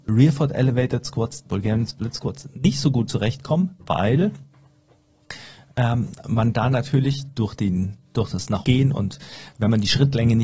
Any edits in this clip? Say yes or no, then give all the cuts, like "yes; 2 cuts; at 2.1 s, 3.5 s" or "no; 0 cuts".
yes; 3 cuts; at 1.5 s, 3.8 s, 8.6 s